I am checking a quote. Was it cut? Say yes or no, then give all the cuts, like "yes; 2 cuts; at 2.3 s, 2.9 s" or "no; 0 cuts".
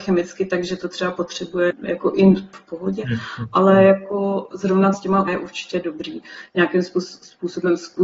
yes; 4 cuts; at 1.7 s, 2.5 s, 4.9 s, 5.3 s